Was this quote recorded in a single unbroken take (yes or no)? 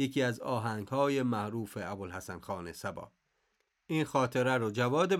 yes